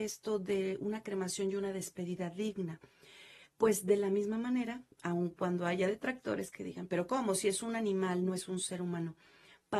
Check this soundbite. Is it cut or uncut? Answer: cut